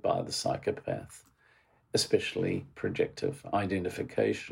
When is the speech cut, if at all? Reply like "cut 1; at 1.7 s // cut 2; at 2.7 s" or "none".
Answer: cut 1; at 2.7 s